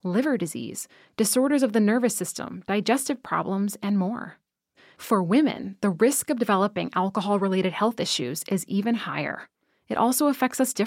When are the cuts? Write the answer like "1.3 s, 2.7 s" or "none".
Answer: none